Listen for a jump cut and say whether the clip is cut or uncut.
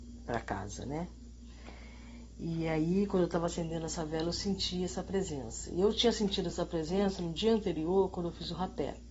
uncut